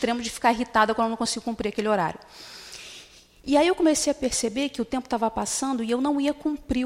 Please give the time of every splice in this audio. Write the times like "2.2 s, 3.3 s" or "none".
none